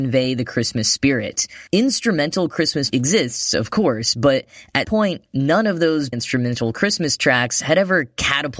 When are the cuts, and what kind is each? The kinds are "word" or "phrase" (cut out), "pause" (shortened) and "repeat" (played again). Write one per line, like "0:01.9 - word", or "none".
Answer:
0:01.7 - pause
0:02.9 - word
0:04.8 - word
0:06.1 - word